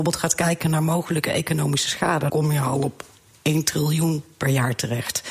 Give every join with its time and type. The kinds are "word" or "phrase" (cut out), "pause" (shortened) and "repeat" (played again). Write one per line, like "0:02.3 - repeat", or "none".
0:02.3 - word

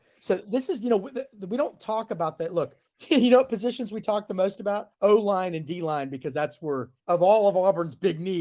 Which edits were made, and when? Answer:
0:04.9 - pause
0:07.0 - pause

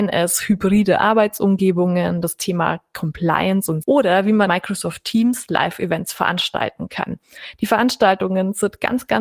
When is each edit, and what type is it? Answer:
0:03.8 - word
0:04.5 - word

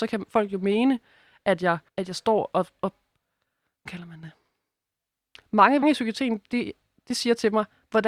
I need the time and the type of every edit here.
0:01.9 - pause
0:03.9 - phrase
0:05.8 - phrase

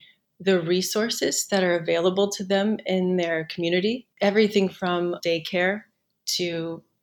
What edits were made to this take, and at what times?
0:04.1 - pause
0:05.2 - word

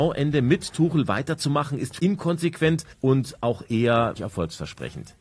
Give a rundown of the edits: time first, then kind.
0:02.0 - word
0:02.9 - pause
0:04.2 - word

